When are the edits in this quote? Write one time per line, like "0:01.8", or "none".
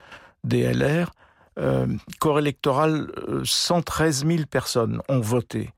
none